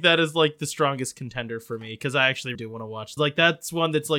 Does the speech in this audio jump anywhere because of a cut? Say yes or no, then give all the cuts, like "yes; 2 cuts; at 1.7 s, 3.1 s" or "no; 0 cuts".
yes; 2 cuts; at 2.5 s, 3.2 s